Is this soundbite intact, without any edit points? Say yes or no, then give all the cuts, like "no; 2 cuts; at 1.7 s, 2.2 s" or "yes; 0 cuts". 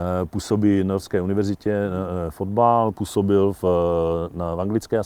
yes; 0 cuts